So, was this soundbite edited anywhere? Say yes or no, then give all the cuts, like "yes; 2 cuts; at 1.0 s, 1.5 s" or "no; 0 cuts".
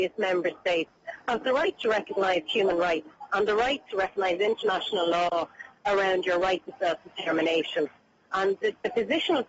no; 0 cuts